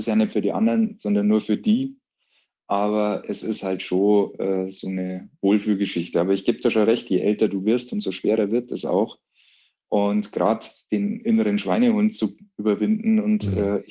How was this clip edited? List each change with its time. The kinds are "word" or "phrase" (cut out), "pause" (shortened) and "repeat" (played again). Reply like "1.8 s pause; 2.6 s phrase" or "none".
none